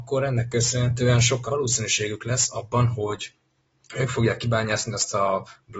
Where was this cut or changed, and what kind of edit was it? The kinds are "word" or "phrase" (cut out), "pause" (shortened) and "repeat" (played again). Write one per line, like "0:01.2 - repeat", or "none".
0:01.5 - word